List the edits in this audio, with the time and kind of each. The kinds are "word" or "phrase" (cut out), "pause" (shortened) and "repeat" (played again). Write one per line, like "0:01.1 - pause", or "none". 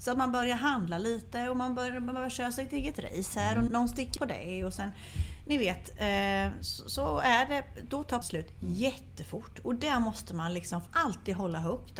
0:03.7 - word
0:04.2 - word
0:08.2 - word
0:10.9 - word